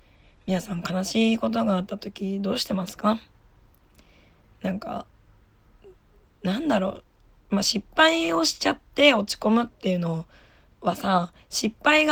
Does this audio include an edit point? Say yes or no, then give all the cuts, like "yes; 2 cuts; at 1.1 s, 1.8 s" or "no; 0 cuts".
no; 0 cuts